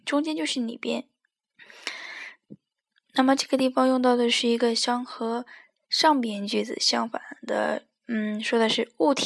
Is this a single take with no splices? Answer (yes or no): yes